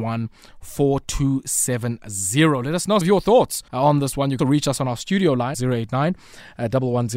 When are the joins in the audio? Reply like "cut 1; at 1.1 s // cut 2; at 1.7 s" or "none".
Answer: cut 1; at 3.0 s // cut 2; at 3.7 s // cut 3; at 4.4 s // cut 4; at 5.5 s